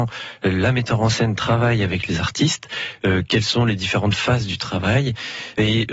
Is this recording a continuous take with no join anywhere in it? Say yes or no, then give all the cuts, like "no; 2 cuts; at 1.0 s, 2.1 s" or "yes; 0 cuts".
yes; 0 cuts